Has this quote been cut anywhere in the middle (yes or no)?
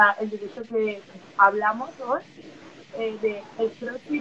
no